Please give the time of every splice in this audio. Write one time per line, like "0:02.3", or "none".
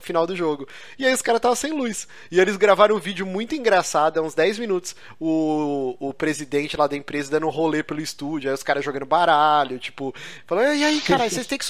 none

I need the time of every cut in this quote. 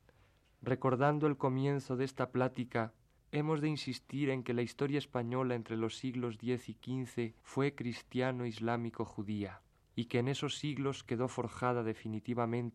0:03.2
0:07.4
0:09.7

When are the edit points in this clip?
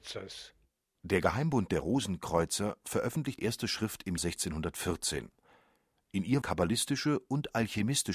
0:03.4
0:04.2
0:06.4

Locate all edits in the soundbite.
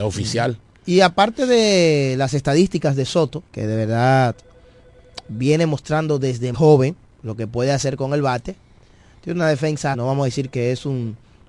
0:03.5
0:06.5
0:09.9

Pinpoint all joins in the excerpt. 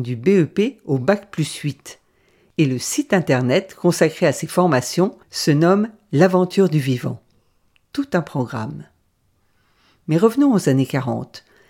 0:05.2

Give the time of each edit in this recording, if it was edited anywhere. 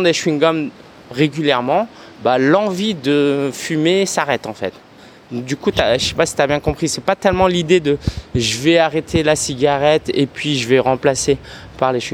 none

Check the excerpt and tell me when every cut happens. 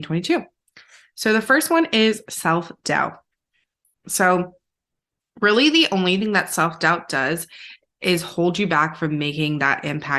none

